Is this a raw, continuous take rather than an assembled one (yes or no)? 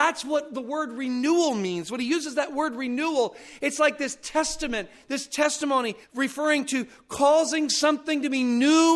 no